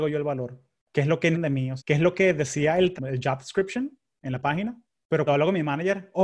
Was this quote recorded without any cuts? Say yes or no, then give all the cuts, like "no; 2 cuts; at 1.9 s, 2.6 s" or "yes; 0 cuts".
no; 4 cuts; at 1.3 s, 1.8 s, 3.0 s, 5.3 s